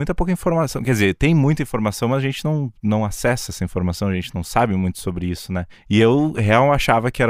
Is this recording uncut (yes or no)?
yes